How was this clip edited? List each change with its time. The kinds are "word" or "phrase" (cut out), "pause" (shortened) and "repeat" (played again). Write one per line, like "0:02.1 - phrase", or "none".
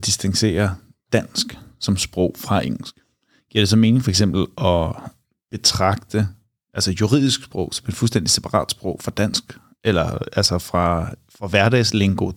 none